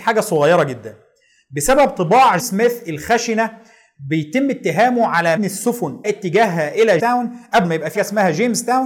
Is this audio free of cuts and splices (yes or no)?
no